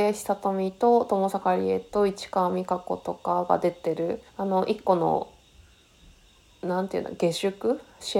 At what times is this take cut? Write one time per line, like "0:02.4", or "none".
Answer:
0:04.3